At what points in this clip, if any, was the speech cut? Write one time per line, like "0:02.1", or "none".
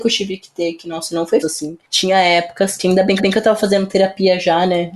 0:01.4
0:03.2